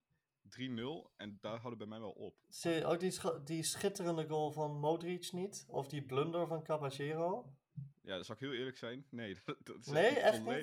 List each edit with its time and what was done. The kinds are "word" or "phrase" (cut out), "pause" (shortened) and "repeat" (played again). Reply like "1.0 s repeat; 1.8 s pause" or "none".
2.4 s pause; 7.9 s pause